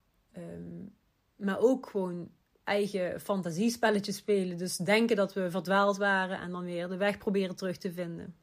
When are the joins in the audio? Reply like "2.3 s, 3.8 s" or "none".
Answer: none